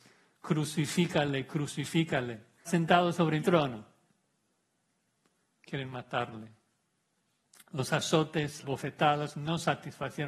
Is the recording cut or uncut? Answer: cut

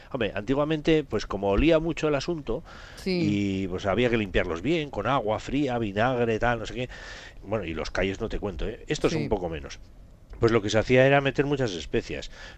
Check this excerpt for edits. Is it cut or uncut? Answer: uncut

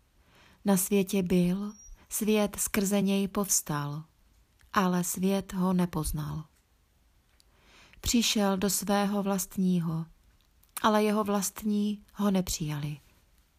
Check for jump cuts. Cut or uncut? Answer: uncut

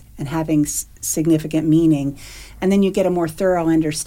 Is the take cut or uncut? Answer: uncut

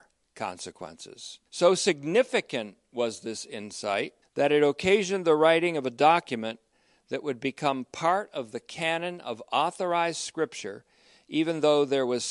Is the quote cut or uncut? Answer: cut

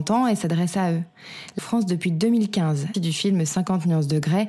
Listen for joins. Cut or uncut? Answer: cut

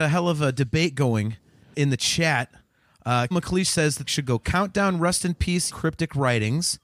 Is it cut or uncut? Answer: cut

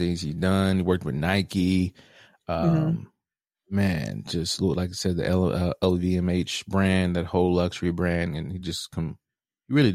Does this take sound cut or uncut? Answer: uncut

